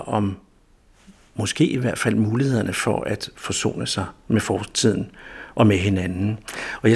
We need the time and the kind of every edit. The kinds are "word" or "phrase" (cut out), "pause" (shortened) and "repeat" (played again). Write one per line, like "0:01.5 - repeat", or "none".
none